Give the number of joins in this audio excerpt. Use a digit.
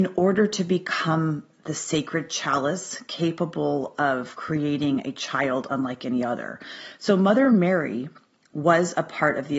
0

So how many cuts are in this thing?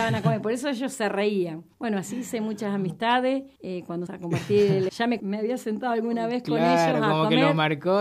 5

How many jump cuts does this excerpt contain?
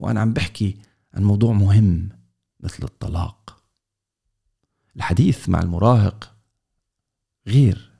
0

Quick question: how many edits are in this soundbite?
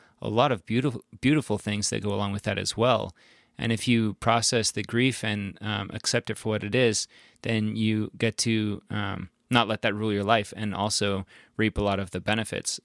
0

